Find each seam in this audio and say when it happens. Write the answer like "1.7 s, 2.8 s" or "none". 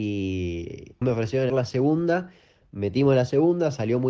1.0 s, 1.5 s